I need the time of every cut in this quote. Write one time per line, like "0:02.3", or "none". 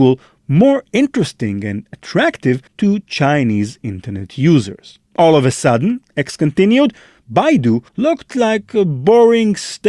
0:02.7
0:05.1
0:07.9